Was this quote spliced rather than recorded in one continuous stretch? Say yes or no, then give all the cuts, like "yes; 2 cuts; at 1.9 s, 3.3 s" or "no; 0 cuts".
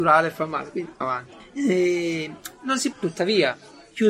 yes; 2 cuts; at 1.0 s, 2.9 s